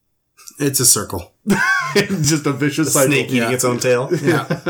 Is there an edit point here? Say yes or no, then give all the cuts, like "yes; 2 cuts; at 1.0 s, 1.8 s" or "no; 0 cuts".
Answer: no; 0 cuts